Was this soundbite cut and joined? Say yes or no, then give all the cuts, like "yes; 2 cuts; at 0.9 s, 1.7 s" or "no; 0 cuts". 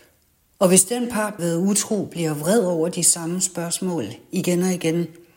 yes; 1 cut; at 1.4 s